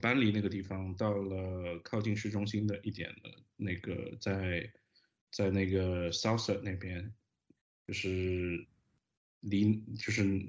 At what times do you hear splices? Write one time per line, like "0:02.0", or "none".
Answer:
none